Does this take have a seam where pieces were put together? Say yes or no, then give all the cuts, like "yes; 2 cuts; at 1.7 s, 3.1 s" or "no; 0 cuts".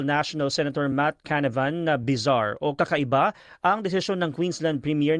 no; 0 cuts